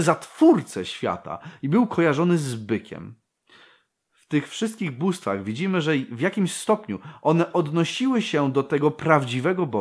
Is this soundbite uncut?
yes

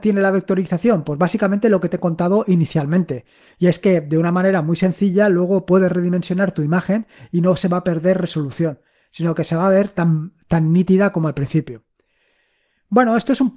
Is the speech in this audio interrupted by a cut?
no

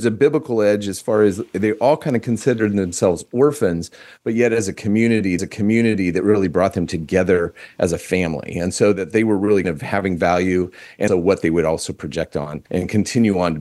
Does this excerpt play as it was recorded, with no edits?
no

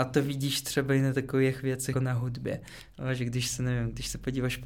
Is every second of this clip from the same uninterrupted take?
no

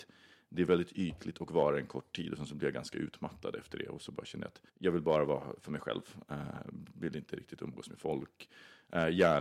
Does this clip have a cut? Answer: yes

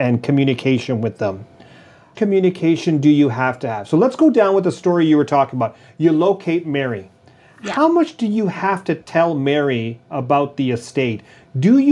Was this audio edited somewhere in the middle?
yes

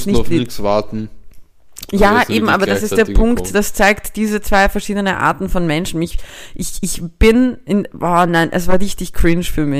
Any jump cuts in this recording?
no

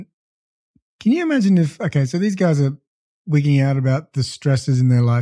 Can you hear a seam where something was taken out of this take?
no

